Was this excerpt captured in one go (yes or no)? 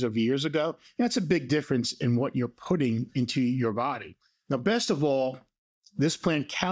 yes